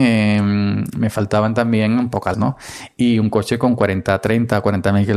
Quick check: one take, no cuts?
no; 1 cut; at 2.3 s

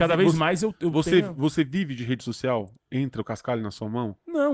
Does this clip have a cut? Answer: no; 0 cuts

